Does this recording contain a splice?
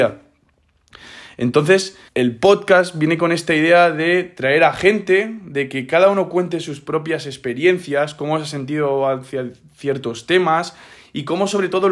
yes; 1 cut; at 2.1 s

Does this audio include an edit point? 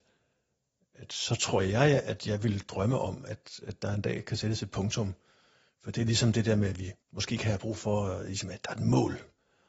yes; 1 cut; at 7.0 s

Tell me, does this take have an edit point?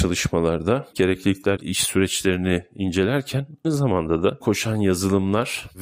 yes; 4 cuts; at 0.9 s, 1.6 s, 3.6 s, 4.4 s

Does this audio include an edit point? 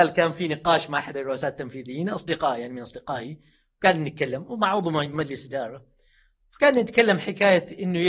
no; 0 cuts

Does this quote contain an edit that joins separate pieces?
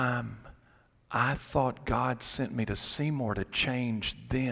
no; 0 cuts

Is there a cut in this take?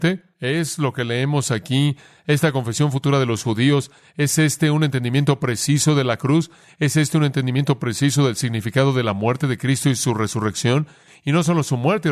no; 0 cuts

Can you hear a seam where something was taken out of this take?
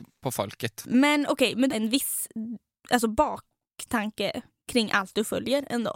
yes; 1 cut; at 1.7 s

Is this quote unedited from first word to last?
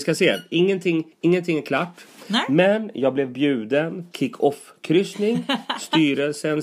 no; 2 cuts; at 1.1 s, 4.1 s

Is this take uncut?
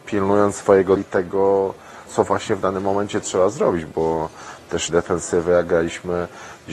no; 5 cuts; at 1.0 s, 2.1 s, 3.2 s, 3.9 s, 4.9 s

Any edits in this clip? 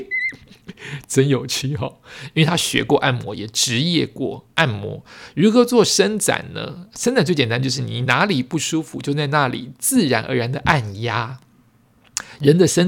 no; 0 cuts

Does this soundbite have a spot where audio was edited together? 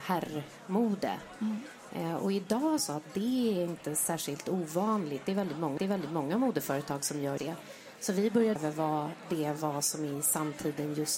yes; 4 cuts; at 2.8 s, 5.8 s, 7.4 s, 8.6 s

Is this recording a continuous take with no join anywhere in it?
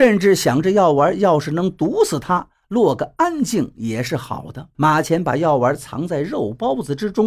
no; 1 cut; at 4.7 s

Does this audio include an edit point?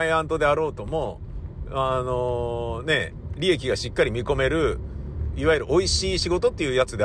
no; 0 cuts

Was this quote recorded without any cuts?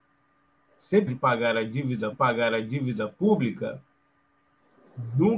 no; 2 cuts; at 1.1 s, 2.1 s

